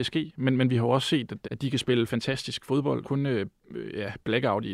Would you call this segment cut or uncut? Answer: cut